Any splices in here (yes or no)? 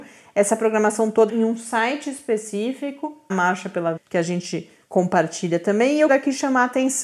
yes